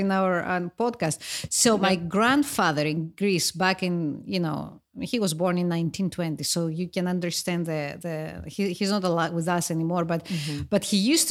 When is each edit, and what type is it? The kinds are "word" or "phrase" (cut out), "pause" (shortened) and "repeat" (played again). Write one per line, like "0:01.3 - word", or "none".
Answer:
none